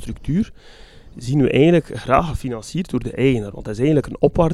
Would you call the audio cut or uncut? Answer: uncut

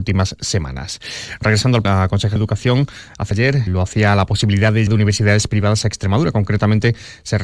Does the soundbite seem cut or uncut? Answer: cut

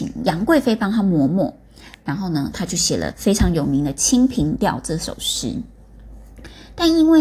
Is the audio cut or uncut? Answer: uncut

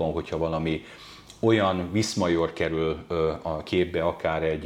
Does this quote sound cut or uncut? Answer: uncut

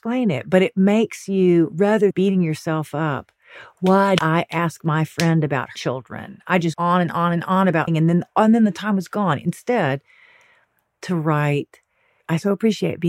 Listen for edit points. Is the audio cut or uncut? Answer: cut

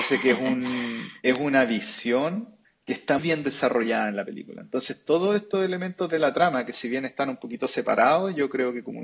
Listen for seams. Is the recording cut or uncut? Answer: cut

